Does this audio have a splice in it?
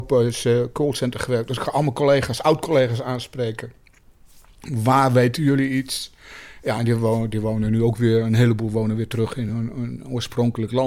no; 0 cuts

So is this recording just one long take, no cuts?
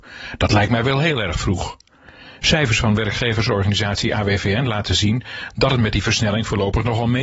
yes; 0 cuts

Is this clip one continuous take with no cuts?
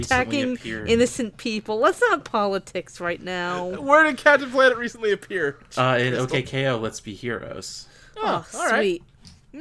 yes; 0 cuts

